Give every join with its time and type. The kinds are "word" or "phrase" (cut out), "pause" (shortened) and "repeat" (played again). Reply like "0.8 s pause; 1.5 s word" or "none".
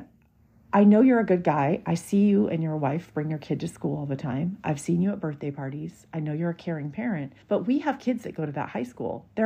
7.4 s pause